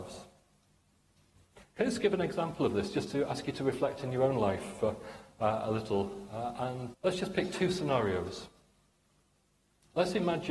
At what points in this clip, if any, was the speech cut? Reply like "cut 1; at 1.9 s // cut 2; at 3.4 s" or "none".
cut 1; at 6.9 s